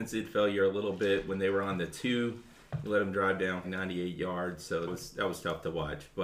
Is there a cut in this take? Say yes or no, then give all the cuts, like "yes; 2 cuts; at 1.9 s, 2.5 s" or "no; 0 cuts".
yes; 2 cuts; at 3.6 s, 4.9 s